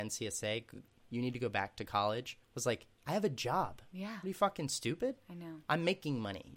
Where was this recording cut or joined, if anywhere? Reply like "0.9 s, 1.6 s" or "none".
2.4 s, 2.9 s